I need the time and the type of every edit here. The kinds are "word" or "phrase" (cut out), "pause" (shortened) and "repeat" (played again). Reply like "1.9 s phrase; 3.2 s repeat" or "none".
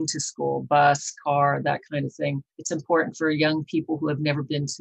2.5 s pause